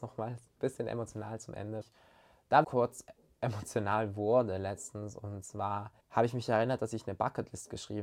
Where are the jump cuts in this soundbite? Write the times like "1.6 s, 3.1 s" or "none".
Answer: 1.8 s, 2.6 s, 6.0 s